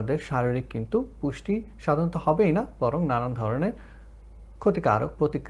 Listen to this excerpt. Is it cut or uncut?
uncut